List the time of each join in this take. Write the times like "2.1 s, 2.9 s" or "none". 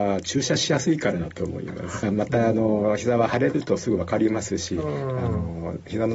2.0 s